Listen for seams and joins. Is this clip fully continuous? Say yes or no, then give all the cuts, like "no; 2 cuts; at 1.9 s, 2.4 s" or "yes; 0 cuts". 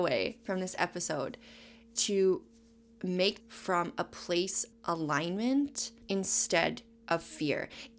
no; 4 cuts; at 2.0 s, 3.4 s, 4.7 s, 6.0 s